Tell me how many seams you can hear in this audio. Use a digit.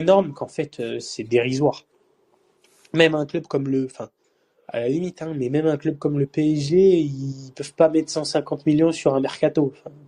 0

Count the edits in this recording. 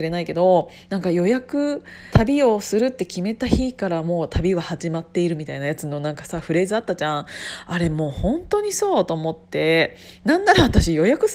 1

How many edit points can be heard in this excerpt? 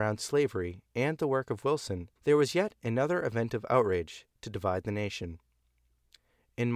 1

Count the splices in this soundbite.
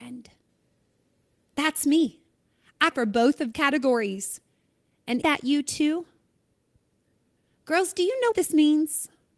4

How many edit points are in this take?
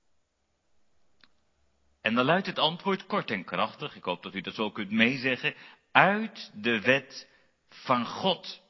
0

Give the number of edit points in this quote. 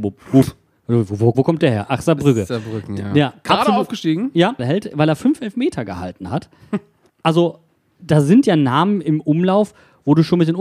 3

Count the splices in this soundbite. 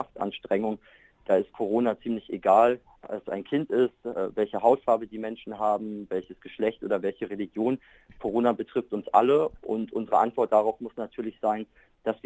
1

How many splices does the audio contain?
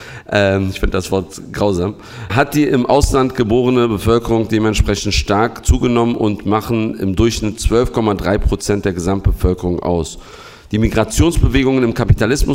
1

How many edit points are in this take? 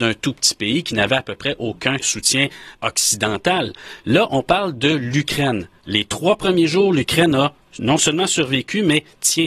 2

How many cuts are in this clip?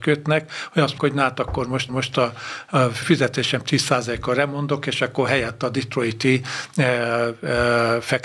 3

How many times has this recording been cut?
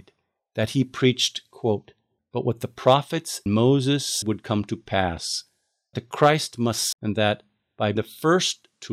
6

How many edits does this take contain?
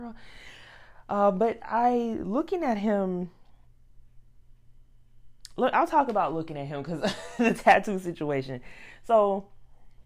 0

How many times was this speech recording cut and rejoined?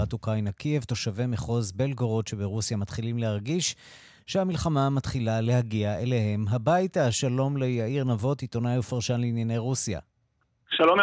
0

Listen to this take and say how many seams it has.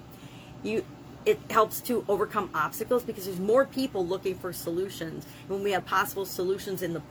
1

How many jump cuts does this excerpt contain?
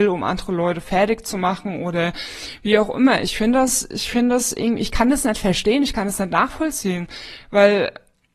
0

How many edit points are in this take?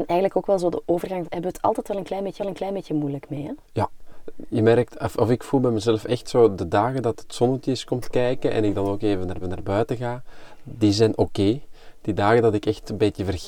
4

